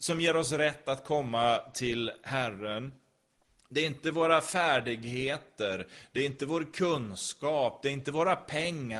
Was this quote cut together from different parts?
no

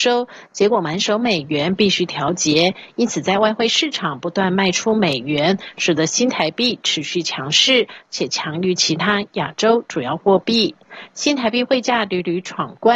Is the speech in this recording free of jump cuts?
yes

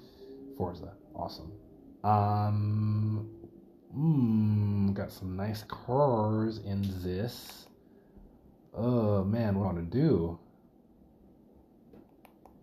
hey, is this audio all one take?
no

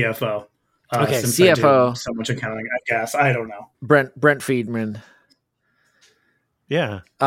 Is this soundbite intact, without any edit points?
no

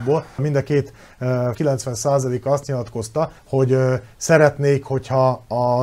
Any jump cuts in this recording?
yes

